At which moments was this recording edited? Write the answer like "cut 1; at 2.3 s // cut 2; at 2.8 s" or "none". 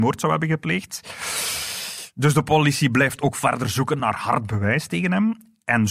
none